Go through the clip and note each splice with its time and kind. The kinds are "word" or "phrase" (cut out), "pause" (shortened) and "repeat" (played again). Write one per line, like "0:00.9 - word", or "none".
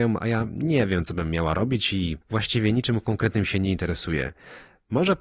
0:02.2 - pause